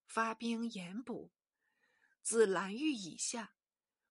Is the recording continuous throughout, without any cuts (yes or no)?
yes